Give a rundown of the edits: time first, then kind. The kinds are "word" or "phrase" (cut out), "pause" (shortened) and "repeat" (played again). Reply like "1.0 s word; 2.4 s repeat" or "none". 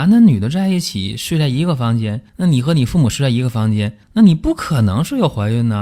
2.3 s pause; 4.0 s pause